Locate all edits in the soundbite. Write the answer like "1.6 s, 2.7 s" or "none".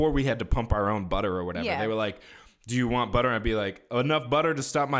none